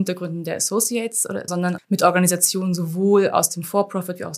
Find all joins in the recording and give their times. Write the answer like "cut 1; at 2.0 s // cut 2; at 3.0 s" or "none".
cut 1; at 1.5 s // cut 2; at 1.8 s

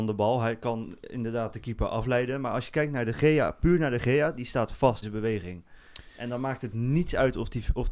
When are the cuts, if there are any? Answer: cut 1; at 5.0 s

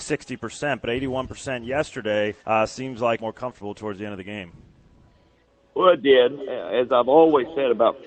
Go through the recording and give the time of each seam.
cut 1; at 2.4 s // cut 2; at 3.2 s

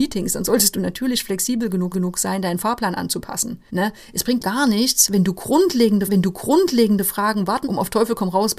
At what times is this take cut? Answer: cut 1; at 1.9 s // cut 2; at 3.7 s // cut 3; at 4.4 s // cut 4; at 6.1 s // cut 5; at 7.6 s

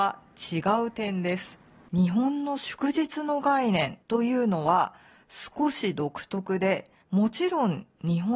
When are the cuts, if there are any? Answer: cut 1; at 1.8 s // cut 2; at 4.0 s // cut 3; at 7.0 s

